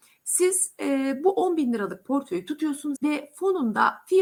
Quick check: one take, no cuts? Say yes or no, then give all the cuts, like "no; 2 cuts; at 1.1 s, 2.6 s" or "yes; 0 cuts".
no; 1 cut; at 3.0 s